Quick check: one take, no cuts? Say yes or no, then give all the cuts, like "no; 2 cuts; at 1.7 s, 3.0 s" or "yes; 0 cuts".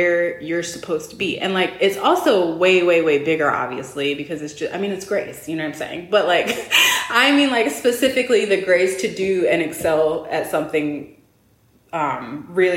yes; 0 cuts